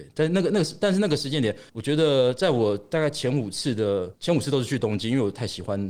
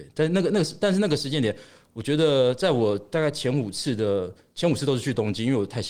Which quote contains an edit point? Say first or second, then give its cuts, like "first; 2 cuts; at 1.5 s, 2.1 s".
first; 2 cuts; at 1.7 s, 4.1 s